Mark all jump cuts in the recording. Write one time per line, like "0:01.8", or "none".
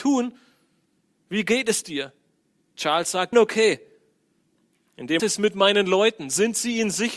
0:03.3
0:05.2

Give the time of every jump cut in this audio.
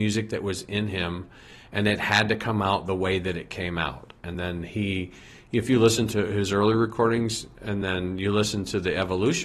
none

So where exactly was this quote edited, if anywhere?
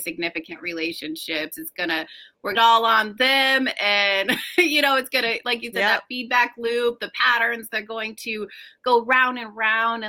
0:02.5

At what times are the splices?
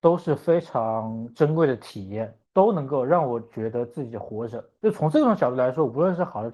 0:02.4
0:04.8

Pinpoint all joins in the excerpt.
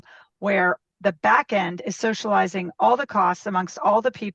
none

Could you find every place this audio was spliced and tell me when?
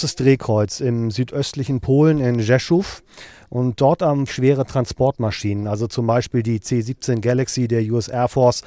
0:04.3

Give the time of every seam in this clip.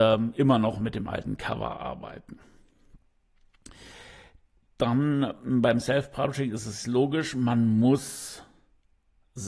none

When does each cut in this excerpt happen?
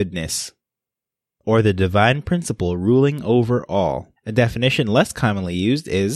0:04.2

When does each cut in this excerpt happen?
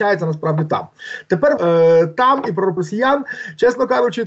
0:01.6
0:02.8

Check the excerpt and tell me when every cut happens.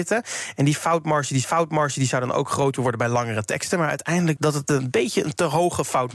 0:01.4
0:04.4

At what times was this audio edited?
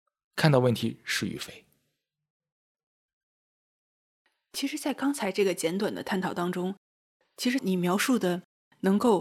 0:07.6

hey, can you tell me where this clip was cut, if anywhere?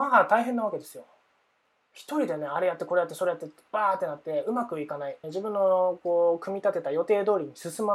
0:05.2

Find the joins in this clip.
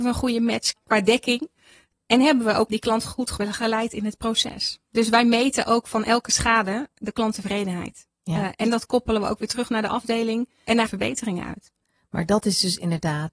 0:02.7
0:10.9

